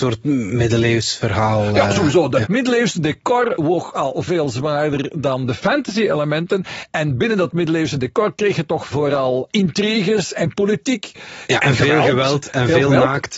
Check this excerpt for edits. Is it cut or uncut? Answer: uncut